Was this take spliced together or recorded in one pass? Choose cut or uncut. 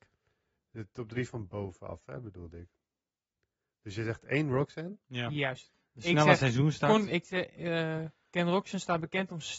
uncut